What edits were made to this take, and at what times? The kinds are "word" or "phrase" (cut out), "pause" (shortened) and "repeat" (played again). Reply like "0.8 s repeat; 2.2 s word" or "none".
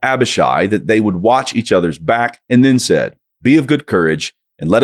none